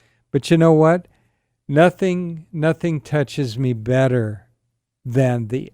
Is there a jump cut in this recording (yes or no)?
no